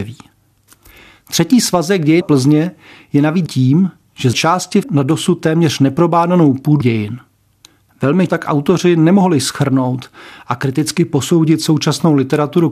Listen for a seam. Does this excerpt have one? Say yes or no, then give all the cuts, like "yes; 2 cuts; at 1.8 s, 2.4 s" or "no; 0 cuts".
yes; 6 cuts; at 2.2 s, 3.5 s, 4.3 s, 4.8 s, 6.8 s, 8.3 s